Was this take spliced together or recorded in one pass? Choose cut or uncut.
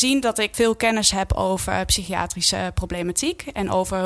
uncut